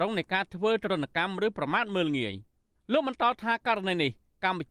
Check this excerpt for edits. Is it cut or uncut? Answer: uncut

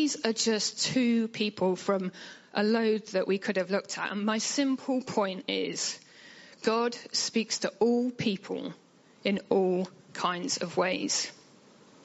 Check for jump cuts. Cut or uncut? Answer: uncut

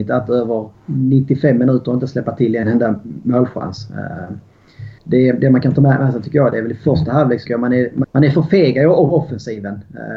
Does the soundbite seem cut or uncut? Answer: cut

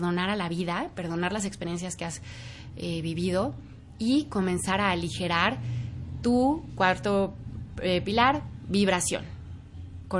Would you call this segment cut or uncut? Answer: uncut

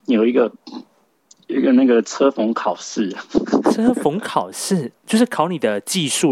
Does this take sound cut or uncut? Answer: cut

